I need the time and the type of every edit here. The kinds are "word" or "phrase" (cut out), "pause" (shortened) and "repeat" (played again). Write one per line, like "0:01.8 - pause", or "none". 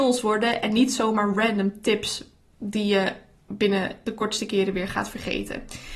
none

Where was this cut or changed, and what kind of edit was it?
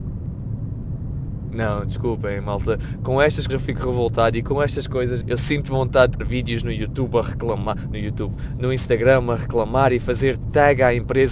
0:03.5 - word
0:05.2 - word
0:06.2 - word

